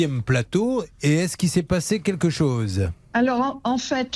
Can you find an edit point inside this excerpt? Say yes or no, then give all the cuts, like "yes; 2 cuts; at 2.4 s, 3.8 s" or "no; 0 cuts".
no; 0 cuts